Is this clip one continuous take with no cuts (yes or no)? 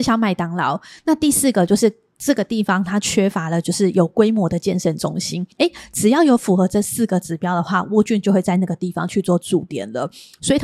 no